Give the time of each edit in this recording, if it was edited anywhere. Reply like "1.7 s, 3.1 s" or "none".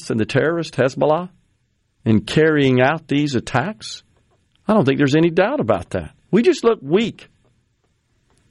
none